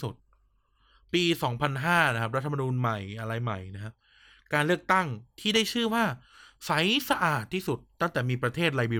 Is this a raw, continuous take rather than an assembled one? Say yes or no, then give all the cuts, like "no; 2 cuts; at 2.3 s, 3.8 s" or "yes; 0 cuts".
yes; 0 cuts